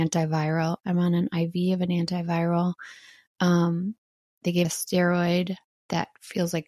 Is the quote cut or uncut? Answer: cut